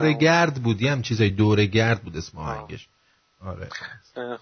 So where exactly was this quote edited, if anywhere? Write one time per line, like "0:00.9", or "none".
none

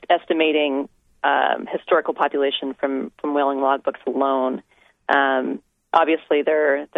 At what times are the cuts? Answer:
none

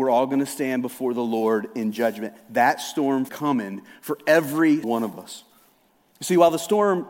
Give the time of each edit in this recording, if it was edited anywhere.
0:03.3
0:04.8

